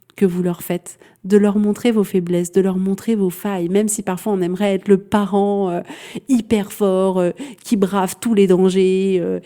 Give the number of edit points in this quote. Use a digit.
0